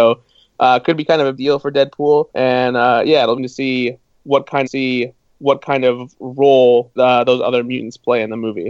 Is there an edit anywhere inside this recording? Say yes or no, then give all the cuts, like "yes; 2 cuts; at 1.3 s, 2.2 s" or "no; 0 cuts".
yes; 5 cuts; at 1.4 s, 2.3 s, 3.4 s, 4.7 s, 7.0 s